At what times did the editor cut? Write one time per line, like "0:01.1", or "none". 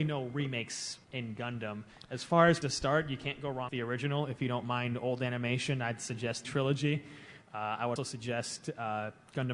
0:01.0
0:02.6
0:03.7
0:06.4
0:08.0